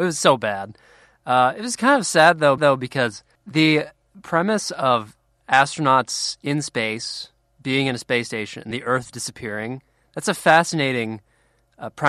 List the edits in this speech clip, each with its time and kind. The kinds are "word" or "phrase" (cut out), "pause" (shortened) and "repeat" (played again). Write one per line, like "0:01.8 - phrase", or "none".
0:02.6 - repeat
0:08.7 - word